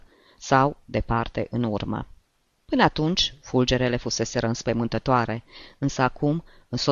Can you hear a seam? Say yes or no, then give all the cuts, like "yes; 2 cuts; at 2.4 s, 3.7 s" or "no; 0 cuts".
no; 0 cuts